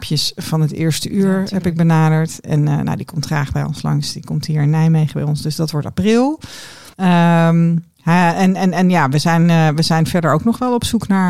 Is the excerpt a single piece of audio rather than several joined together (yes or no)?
no